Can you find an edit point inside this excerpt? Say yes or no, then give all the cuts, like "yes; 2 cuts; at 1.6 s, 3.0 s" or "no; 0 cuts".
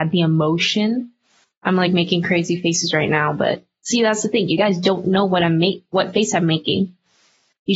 no; 0 cuts